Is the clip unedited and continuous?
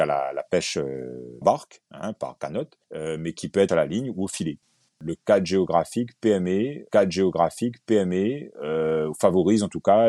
no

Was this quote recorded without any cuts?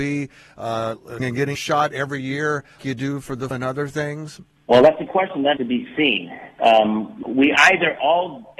no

